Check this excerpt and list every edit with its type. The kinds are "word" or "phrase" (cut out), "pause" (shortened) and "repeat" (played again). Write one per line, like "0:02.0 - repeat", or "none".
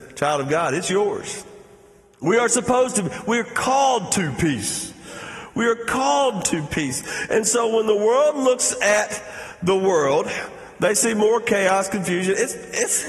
none